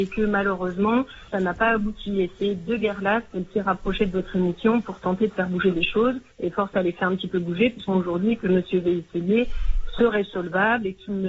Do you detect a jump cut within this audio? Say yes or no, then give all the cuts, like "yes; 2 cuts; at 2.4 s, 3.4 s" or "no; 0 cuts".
yes; 4 cuts; at 1.3 s, 6.3 s, 6.7 s, 7.9 s